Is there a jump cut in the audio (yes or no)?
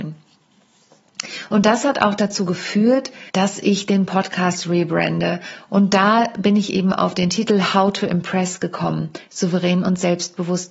yes